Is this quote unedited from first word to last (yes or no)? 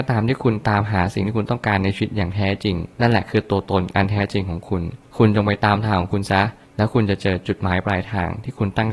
no